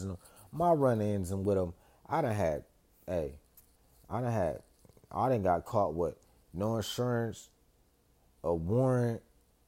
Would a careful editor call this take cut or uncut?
uncut